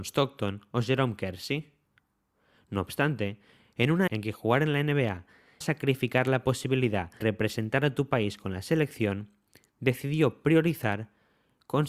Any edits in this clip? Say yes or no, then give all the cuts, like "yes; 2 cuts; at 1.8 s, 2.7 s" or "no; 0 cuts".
yes; 3 cuts; at 4.1 s, 5.6 s, 7.2 s